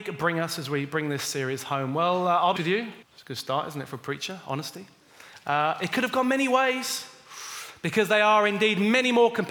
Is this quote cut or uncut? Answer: cut